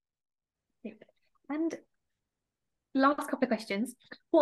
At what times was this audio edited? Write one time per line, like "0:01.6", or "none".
none